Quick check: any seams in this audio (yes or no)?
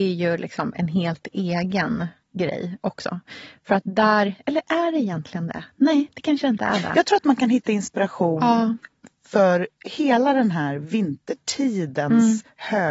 no